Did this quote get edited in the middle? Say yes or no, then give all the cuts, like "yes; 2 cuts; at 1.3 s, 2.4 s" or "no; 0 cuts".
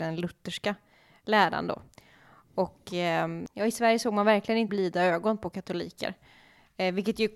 yes; 1 cut; at 4.7 s